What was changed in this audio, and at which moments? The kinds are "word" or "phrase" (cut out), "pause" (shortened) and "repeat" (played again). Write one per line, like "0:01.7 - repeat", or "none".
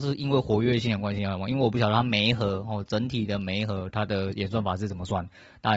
none